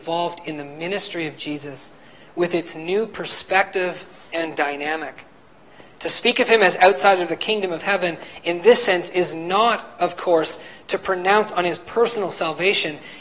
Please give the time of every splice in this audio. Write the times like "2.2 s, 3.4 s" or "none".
none